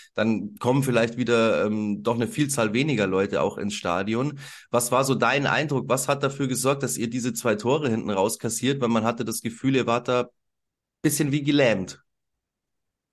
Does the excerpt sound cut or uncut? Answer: uncut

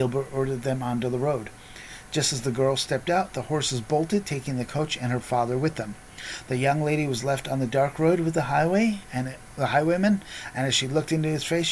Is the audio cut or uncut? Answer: uncut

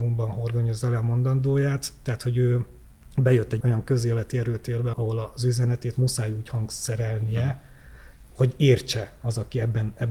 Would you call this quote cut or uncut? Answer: cut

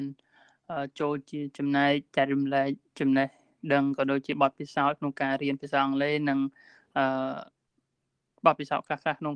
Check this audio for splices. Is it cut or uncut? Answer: uncut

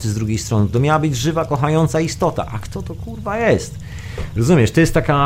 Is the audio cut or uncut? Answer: uncut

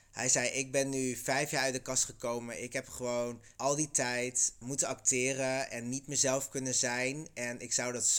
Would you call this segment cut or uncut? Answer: cut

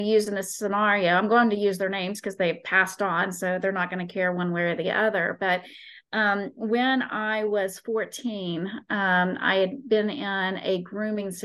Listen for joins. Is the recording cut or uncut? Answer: uncut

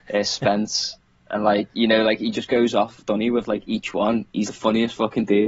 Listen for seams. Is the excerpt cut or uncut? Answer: cut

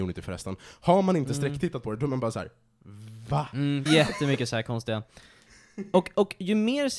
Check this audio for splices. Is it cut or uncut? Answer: cut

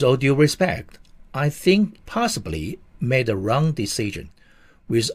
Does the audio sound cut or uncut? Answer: cut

